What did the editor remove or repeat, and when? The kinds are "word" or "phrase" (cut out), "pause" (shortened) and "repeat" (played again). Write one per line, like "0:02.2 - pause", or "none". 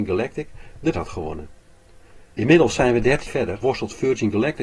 0:00.9 - word
0:02.3 - pause
0:03.3 - word
0:03.6 - word